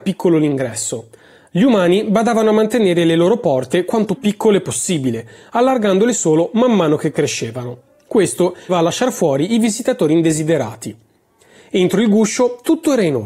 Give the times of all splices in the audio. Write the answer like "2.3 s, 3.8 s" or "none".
4.1 s, 8.7 s